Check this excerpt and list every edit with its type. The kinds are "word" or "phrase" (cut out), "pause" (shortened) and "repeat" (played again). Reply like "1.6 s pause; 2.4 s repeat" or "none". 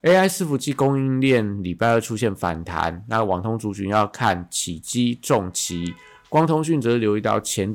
none